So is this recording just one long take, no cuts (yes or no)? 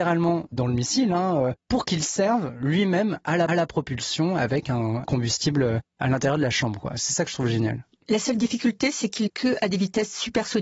no